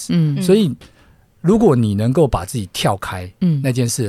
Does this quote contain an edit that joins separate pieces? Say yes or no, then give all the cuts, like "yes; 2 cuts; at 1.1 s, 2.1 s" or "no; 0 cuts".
no; 0 cuts